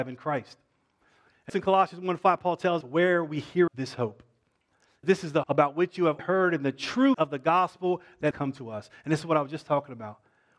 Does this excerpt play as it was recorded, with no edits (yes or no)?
no